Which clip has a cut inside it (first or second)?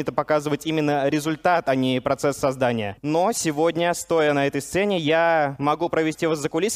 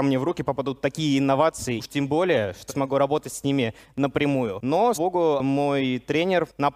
second